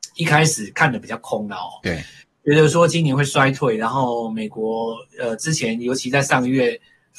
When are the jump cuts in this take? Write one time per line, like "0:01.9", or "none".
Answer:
none